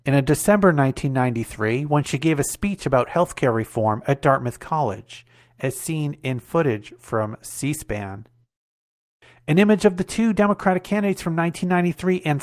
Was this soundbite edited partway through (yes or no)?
no